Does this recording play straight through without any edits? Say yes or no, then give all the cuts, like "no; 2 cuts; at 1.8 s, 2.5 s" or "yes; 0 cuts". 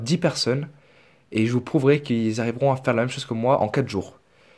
yes; 0 cuts